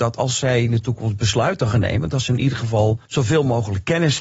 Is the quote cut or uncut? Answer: cut